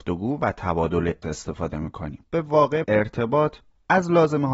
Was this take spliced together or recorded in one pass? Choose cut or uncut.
cut